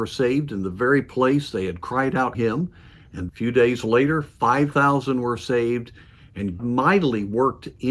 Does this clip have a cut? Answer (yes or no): yes